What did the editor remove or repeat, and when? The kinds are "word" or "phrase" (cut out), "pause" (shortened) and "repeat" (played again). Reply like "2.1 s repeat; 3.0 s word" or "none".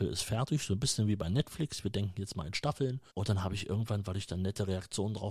3.1 s pause